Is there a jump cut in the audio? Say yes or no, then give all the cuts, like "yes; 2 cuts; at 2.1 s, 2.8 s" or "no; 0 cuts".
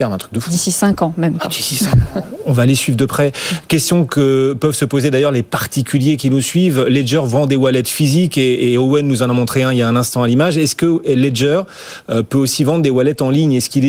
no; 0 cuts